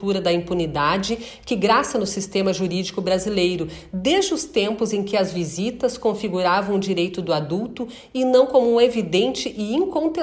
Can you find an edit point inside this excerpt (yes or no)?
no